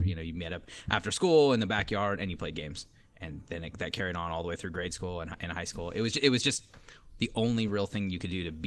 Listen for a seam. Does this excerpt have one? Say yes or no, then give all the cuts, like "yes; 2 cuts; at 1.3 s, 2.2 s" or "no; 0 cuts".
no; 0 cuts